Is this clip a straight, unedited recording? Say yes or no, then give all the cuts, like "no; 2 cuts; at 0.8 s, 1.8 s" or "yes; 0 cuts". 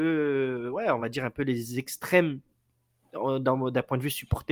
yes; 0 cuts